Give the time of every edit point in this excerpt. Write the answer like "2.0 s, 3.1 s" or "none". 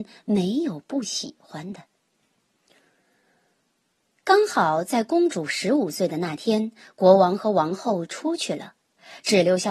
none